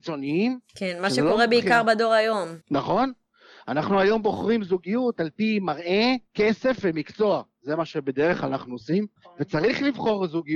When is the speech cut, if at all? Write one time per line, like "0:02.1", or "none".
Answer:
0:02.6
0:06.3
0:09.2

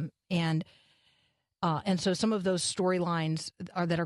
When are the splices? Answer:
none

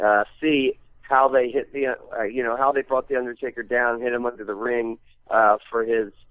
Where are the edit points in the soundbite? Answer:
none

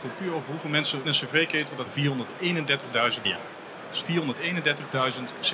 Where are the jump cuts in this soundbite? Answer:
0:01.0
0:01.9
0:03.2
0:04.0

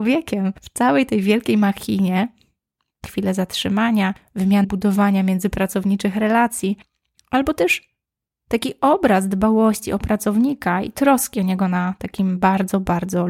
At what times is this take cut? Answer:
0:03.0
0:04.6

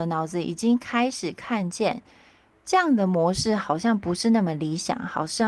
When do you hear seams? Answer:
0:02.5

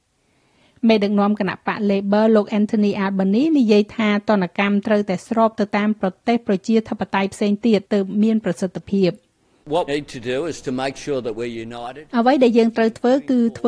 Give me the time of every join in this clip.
0:07.8
0:09.9

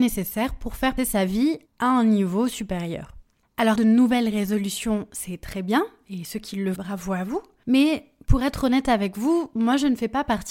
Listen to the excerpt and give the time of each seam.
0:01.0
0:01.7
0:03.8
0:06.8

